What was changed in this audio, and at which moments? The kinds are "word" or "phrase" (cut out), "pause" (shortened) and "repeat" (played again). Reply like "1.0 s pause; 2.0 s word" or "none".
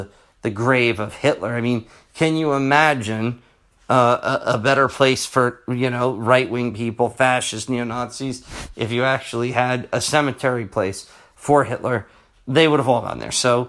none